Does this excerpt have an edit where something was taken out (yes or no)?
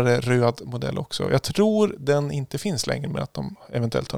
no